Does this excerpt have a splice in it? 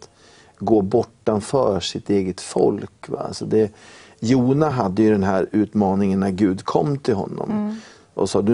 no; 0 cuts

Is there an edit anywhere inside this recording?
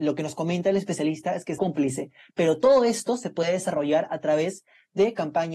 yes; 1 cut; at 1.6 s

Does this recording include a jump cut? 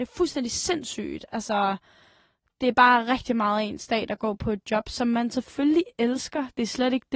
no; 0 cuts

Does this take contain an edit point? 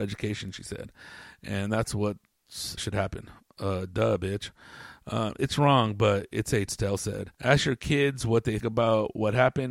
yes; 4 cuts; at 2.8 s, 6.7 s, 7.3 s, 8.6 s

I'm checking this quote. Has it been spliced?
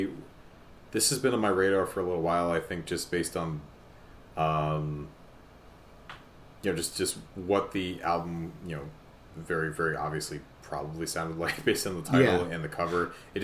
no; 0 cuts

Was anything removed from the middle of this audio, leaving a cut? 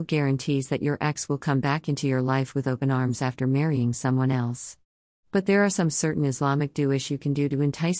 no; 0 cuts

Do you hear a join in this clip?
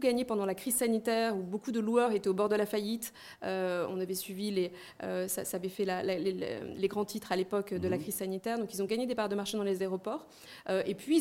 no; 0 cuts

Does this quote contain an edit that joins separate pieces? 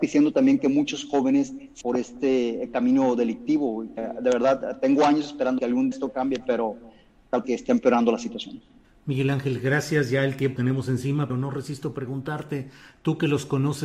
yes; 8 cuts; at 1.8 s, 4.0 s, 5.6 s, 5.9 s, 7.4 s, 8.8 s, 10.6 s, 11.3 s

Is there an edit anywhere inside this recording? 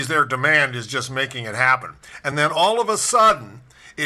no; 0 cuts

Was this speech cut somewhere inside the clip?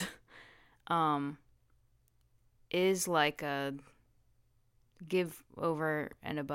no; 0 cuts

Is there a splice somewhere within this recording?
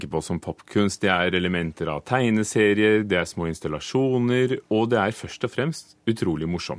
yes; 1 cut; at 4.6 s

